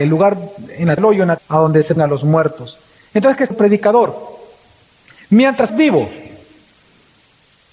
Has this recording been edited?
yes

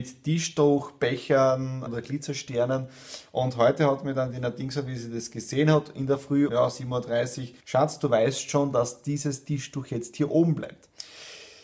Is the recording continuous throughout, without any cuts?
no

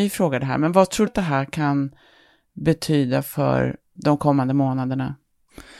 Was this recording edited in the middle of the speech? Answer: yes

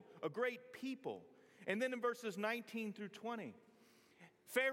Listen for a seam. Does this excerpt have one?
no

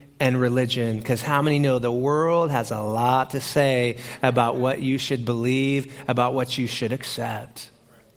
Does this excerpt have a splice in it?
no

